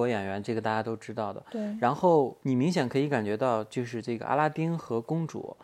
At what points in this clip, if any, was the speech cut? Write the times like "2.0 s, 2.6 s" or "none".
2.4 s